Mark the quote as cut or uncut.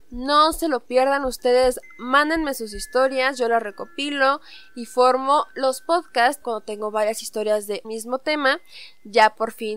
cut